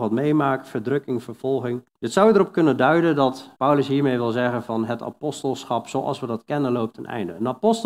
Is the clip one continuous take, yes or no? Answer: no